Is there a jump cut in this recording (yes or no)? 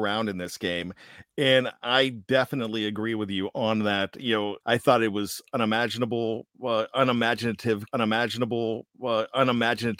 yes